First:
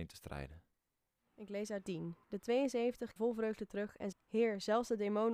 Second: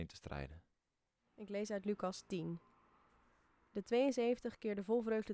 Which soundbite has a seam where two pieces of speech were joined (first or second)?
first